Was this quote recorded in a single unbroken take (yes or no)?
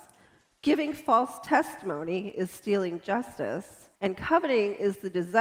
no